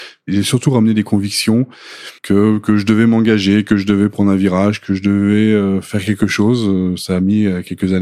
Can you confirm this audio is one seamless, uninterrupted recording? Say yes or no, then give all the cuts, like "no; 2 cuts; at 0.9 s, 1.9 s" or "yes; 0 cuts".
no; 1 cut; at 2.2 s